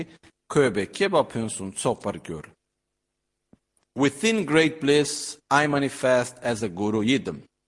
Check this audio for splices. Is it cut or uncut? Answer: uncut